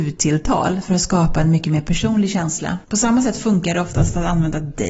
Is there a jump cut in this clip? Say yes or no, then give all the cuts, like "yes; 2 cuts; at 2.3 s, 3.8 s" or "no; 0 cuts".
yes; 1 cut; at 2.8 s